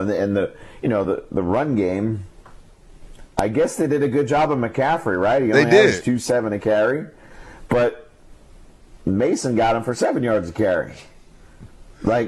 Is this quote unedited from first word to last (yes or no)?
yes